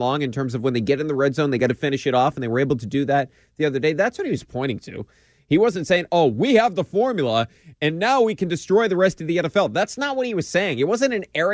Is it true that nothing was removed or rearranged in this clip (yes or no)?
yes